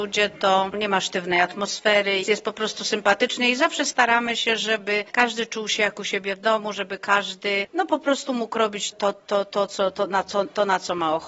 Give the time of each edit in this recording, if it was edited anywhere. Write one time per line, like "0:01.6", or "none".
0:02.2
0:08.9